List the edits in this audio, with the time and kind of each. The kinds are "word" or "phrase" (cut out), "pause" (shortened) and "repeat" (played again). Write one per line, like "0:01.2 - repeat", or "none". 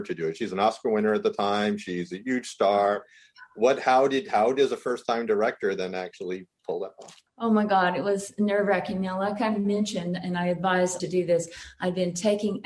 0:07.3 - pause
0:11.0 - phrase